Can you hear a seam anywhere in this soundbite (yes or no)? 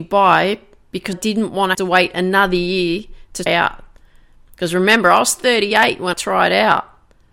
yes